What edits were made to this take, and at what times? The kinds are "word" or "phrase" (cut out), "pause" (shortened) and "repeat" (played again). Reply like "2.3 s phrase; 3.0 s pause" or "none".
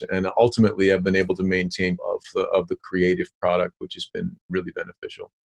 2.0 s word